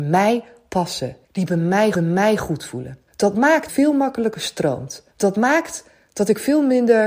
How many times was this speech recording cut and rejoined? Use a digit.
5